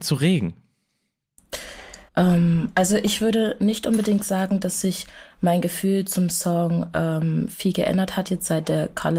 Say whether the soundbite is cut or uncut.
cut